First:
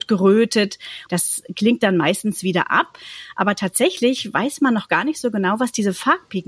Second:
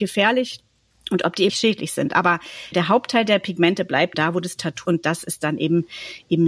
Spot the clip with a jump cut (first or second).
second